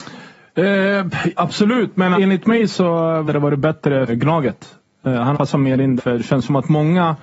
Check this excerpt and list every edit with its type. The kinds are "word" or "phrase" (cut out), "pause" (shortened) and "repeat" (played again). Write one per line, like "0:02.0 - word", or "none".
0:02.1 - word
0:03.3 - word
0:04.1 - word
0:05.3 - word
0:06.0 - word